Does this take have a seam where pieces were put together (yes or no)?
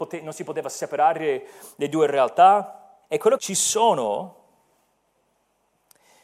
yes